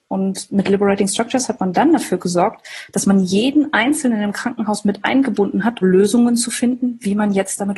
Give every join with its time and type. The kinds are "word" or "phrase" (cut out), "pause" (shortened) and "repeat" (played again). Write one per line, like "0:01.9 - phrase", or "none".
0:05.8 - word